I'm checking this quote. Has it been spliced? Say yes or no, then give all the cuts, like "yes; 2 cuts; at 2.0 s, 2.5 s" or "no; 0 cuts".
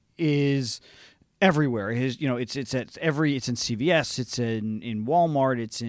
no; 0 cuts